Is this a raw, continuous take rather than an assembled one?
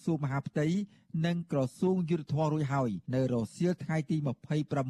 no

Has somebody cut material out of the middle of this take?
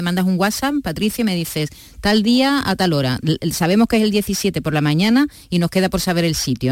no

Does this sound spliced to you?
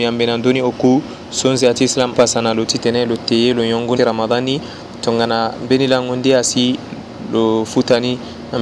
yes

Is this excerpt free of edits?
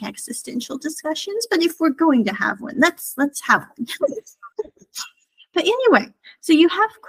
no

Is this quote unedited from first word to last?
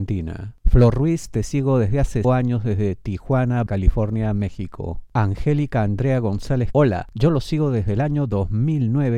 no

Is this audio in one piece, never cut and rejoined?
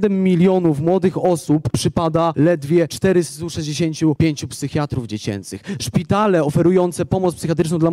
yes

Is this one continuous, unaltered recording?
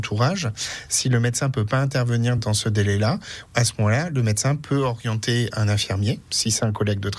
yes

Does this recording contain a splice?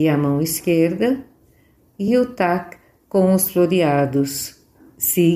no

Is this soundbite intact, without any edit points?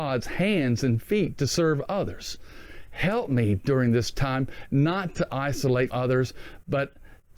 no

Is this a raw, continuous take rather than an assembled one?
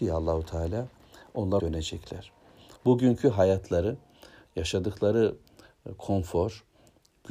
no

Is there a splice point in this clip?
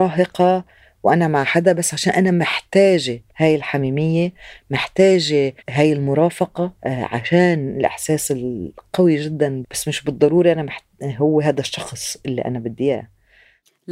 yes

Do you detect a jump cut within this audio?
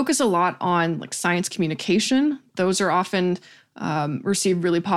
no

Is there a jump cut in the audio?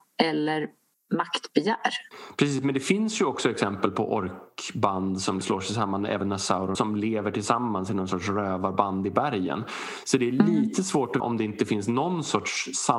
yes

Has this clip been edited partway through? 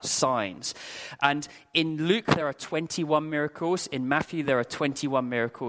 no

